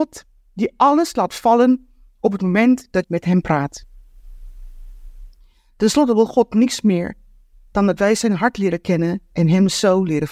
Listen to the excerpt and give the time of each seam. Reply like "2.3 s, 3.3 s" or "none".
3.0 s